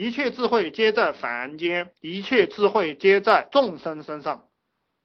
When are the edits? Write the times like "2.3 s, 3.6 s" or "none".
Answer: 2.0 s